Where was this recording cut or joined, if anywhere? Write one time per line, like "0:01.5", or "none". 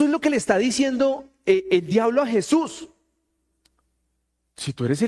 none